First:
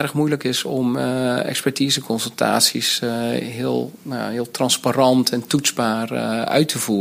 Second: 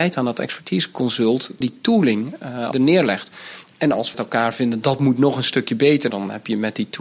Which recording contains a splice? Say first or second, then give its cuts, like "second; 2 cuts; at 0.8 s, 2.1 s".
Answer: second; 4 cuts; at 1.6 s, 2.7 s, 4.1 s, 6.1 s